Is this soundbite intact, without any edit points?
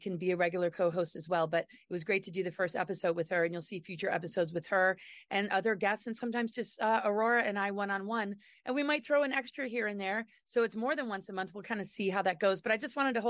yes; 0 cuts

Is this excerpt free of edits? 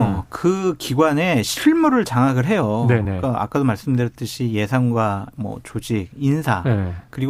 yes; 0 cuts

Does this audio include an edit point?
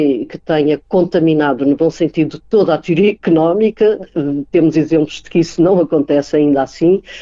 yes; 1 cut; at 2.4 s

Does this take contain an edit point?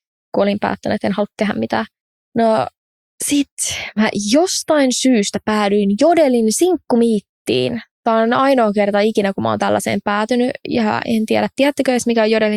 no; 0 cuts

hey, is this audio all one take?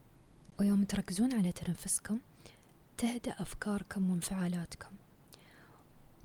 yes; 0 cuts

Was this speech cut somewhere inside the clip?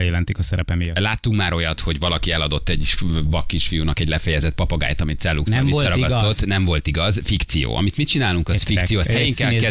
no; 0 cuts

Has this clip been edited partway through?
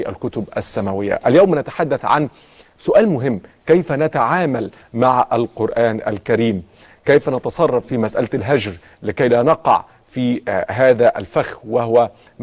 no; 0 cuts

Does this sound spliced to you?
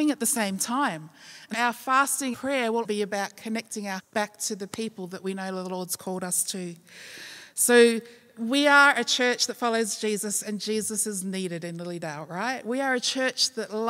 yes; 4 cuts; at 1.5 s, 2.3 s, 2.8 s, 4.0 s

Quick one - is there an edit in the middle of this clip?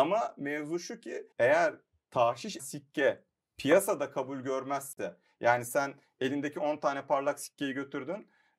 yes; 2 cuts; at 1.3 s, 2.6 s

